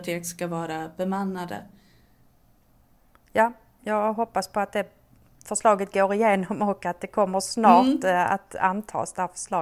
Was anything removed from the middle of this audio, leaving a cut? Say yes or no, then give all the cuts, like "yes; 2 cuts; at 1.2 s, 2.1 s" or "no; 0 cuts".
no; 0 cuts